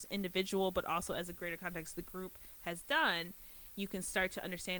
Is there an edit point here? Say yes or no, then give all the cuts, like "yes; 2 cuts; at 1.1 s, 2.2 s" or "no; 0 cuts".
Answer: no; 0 cuts